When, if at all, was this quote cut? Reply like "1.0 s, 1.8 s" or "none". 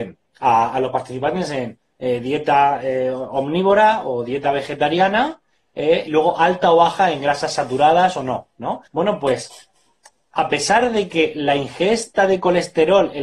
6.1 s, 8.9 s